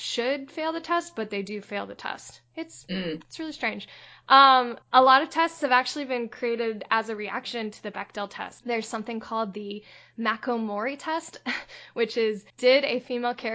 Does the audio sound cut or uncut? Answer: cut